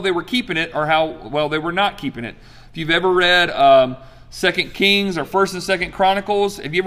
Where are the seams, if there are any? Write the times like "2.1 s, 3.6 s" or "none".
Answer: none